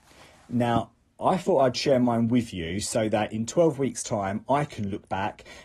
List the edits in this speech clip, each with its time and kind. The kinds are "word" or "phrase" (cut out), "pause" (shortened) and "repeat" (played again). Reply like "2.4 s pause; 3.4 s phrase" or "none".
none